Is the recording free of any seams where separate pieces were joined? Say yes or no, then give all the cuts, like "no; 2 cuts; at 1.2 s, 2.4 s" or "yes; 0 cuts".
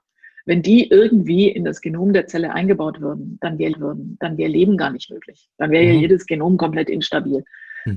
no; 1 cut; at 3.7 s